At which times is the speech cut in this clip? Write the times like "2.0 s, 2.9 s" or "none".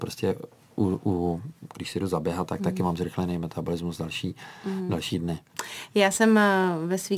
none